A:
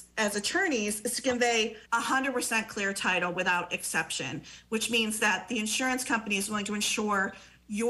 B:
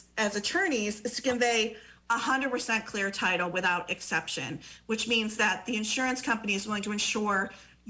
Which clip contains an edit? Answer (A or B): A